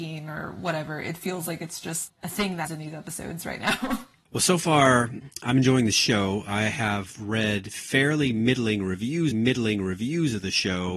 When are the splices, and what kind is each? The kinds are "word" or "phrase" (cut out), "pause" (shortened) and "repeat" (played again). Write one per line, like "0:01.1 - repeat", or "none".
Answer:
0:02.1 - word
0:02.7 - word
0:09.3 - repeat